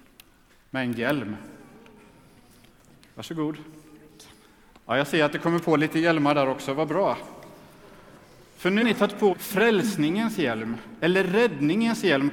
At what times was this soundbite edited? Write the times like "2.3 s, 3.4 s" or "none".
8.8 s, 9.3 s